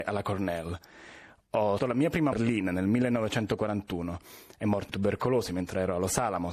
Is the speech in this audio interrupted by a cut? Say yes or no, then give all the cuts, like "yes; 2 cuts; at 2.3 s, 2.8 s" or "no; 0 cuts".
yes; 3 cuts; at 1.8 s, 2.3 s, 4.9 s